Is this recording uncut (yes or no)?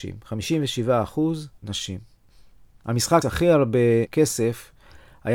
no